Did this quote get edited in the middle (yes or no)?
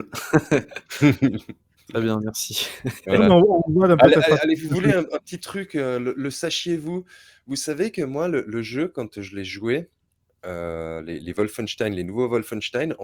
no